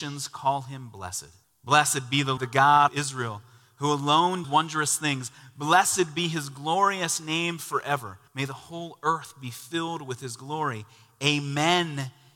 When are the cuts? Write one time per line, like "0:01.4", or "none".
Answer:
0:01.4
0:02.4
0:02.9
0:04.4
0:08.3